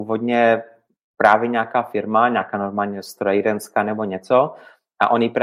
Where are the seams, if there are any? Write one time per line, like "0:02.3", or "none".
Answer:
none